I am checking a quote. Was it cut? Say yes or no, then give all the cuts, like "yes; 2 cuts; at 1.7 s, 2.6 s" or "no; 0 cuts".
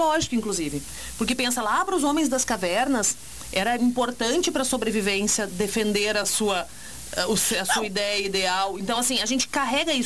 no; 0 cuts